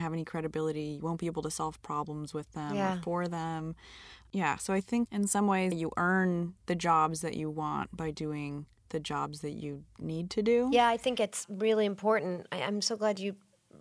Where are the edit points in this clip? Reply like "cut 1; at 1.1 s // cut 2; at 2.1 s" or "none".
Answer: cut 1; at 5.1 s // cut 2; at 5.7 s

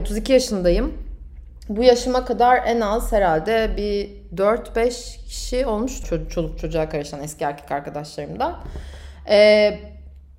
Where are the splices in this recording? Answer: cut 1; at 6.0 s

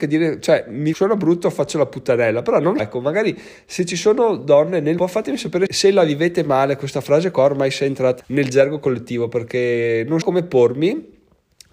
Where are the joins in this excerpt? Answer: cut 1; at 0.9 s // cut 2; at 2.8 s // cut 3; at 5.0 s // cut 4; at 5.7 s // cut 5; at 8.2 s // cut 6; at 10.2 s

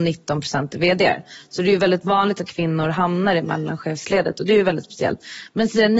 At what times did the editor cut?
cut 1; at 2.5 s

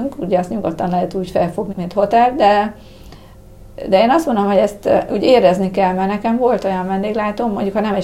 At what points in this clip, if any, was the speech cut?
cut 1; at 1.7 s

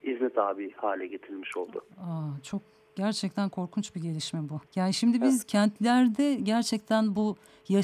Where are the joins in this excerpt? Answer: cut 1; at 1.9 s // cut 2; at 4.7 s

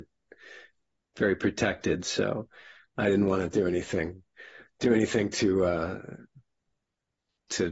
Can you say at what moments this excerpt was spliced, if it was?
none

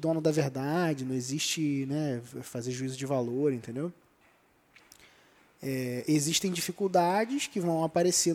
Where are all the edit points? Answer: none

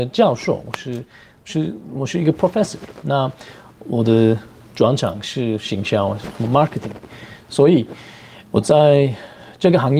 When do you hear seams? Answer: none

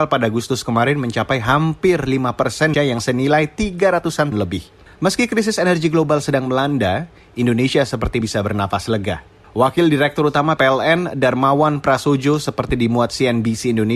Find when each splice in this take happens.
cut 1; at 2.7 s // cut 2; at 4.3 s // cut 3; at 8.2 s // cut 4; at 10.6 s

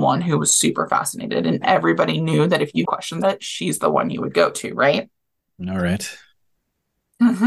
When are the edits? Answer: cut 1; at 2.8 s // cut 2; at 3.2 s

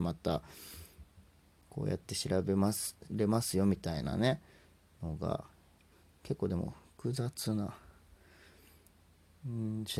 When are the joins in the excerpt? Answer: none

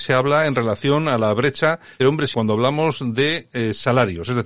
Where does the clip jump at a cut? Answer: cut 1; at 2.0 s // cut 2; at 2.3 s

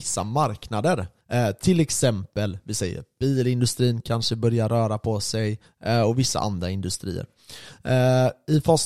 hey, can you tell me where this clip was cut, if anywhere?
cut 1; at 1.2 s

